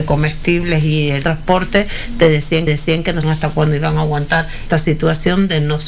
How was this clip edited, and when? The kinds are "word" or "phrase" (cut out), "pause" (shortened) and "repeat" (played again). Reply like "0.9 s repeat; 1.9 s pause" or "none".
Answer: 1.2 s phrase; 2.7 s repeat; 3.2 s word; 4.7 s word